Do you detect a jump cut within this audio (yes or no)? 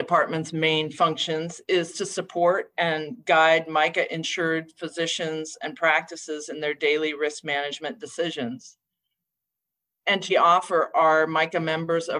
yes